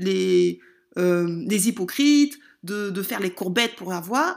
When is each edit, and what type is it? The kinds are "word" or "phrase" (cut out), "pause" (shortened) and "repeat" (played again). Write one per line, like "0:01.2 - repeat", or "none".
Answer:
none